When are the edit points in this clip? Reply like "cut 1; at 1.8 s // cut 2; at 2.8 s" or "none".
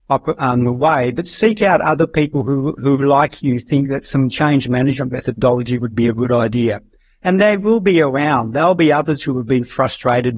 none